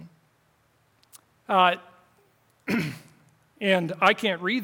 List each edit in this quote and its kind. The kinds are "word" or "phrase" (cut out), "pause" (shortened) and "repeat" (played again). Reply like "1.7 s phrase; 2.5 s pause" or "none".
1.2 s pause